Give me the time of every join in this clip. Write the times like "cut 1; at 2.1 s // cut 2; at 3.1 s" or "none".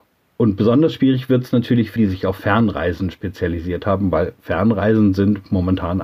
cut 1; at 2.0 s